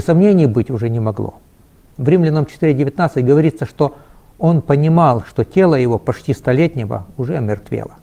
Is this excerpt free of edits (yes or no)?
yes